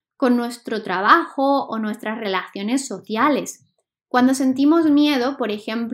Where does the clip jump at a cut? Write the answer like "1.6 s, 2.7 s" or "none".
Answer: none